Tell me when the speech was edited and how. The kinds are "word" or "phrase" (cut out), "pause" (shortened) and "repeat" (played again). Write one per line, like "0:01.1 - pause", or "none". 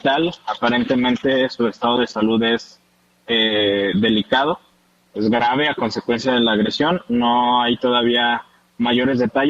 none